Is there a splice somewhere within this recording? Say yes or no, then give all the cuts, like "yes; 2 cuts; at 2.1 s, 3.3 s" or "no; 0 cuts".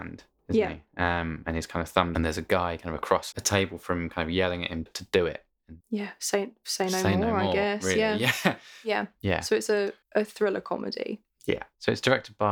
yes; 5 cuts; at 2.1 s, 3.3 s, 4.9 s, 5.8 s, 10.0 s